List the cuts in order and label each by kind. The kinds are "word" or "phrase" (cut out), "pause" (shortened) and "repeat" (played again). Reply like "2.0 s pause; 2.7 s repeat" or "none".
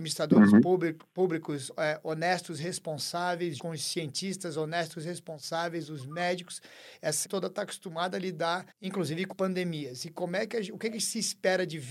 3.6 s word; 7.2 s word; 8.7 s pause; 9.3 s word